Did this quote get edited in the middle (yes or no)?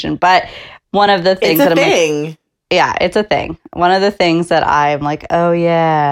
no